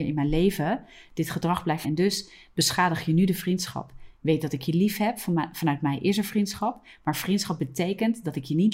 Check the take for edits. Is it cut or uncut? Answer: cut